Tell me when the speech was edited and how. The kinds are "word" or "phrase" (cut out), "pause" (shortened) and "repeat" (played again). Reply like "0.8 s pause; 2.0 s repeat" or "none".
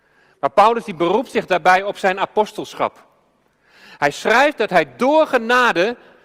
none